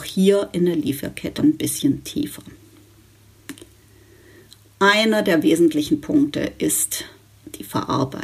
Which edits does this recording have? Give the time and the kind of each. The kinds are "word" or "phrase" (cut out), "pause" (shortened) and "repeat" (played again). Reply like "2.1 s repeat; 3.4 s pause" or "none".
1.4 s word